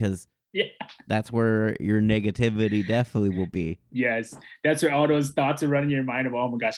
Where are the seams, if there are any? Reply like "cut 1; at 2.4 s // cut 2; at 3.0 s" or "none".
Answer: none